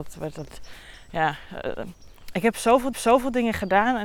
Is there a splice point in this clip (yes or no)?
yes